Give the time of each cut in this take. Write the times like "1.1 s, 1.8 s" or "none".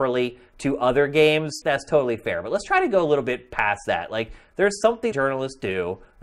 1.6 s, 5.1 s